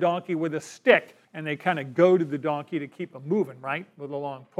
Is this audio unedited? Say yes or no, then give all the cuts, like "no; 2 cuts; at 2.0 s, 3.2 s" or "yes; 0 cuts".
no; 1 cut; at 1.2 s